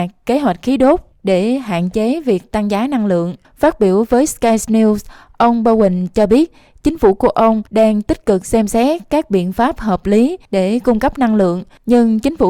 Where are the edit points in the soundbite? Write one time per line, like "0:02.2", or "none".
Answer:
0:03.4
0:07.7